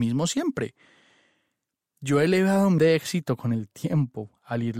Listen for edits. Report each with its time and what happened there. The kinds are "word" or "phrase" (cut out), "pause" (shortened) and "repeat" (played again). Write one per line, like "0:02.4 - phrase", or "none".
0:02.8 - word